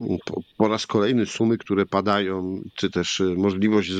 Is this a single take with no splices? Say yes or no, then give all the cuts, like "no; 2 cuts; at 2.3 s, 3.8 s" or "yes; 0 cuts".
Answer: yes; 0 cuts